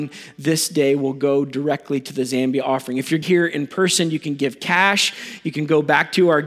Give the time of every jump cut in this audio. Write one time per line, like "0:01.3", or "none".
0:03.2